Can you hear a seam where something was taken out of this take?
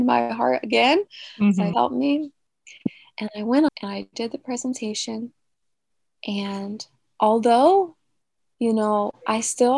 yes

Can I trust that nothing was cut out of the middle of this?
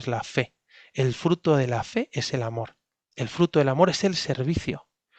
yes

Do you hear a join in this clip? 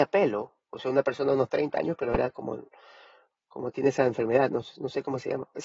no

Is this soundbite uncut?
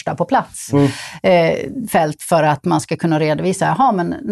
yes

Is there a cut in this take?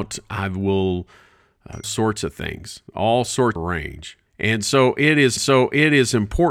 yes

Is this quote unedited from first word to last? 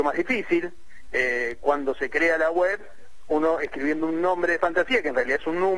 yes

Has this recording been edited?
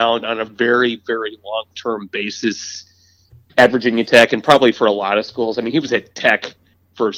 no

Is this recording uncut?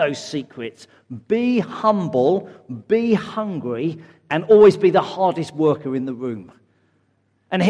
yes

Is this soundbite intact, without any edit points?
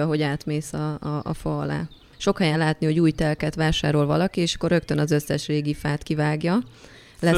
yes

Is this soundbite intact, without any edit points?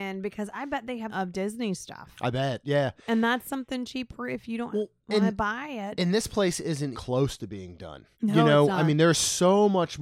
no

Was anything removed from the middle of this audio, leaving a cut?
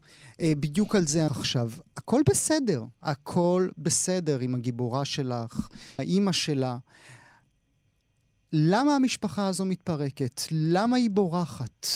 yes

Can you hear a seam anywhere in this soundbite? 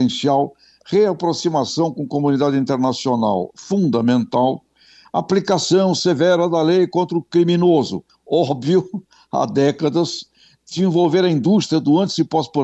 no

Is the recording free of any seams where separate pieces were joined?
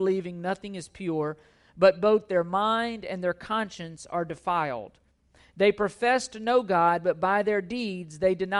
yes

